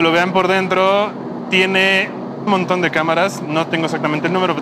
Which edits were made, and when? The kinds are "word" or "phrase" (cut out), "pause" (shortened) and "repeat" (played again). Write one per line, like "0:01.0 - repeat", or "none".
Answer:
0:02.5 - word